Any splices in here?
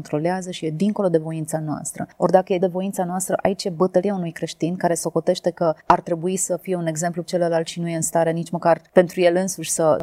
yes; 3 cuts; at 2.6 s, 5.8 s, 7.2 s

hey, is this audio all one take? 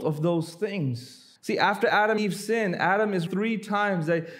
no; 3 cuts; at 1.4 s, 2.2 s, 3.3 s

